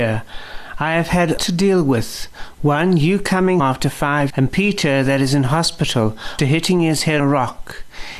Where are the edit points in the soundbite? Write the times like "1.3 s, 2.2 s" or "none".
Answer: 1.4 s, 3.6 s, 4.3 s, 6.4 s, 7.2 s